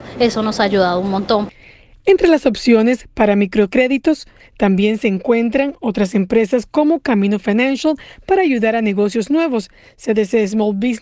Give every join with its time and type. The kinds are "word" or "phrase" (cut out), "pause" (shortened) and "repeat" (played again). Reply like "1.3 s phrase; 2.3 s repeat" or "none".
none